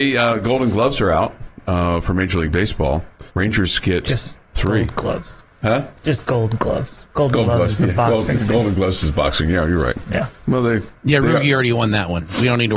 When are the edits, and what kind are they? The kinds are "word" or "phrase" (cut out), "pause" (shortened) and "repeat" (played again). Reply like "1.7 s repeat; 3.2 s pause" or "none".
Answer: 3.3 s pause; 5.5 s pause; 7.1 s pause; 10.4 s pause; 11.0 s pause